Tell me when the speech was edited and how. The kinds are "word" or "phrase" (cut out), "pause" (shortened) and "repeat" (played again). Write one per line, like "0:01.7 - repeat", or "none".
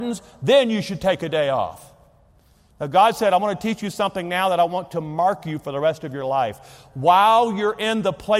none